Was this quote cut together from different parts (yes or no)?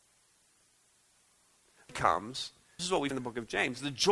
yes